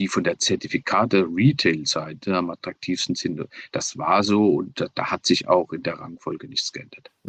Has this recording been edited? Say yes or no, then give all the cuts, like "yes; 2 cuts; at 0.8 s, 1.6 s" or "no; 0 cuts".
no; 0 cuts